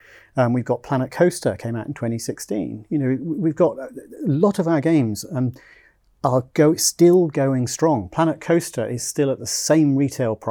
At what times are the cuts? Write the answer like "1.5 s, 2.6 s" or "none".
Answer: none